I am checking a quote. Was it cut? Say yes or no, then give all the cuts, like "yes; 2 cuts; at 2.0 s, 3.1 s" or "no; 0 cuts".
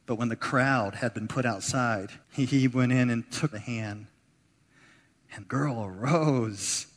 yes; 3 cuts; at 2.2 s, 3.5 s, 5.4 s